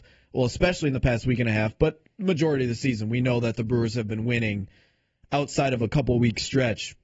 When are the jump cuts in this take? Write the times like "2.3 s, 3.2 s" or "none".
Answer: none